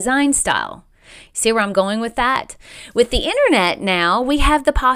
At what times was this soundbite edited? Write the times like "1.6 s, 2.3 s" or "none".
none